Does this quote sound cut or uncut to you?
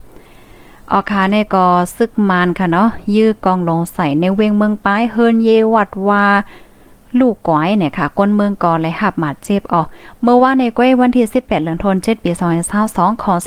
uncut